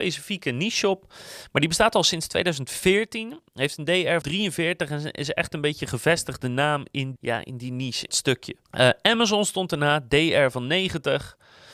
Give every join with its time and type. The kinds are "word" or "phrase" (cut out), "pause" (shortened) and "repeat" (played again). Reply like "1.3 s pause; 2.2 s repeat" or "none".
4.2 s word; 7.2 s word; 8.1 s word

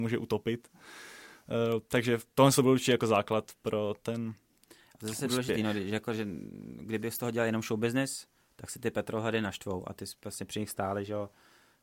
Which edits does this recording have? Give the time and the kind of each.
none

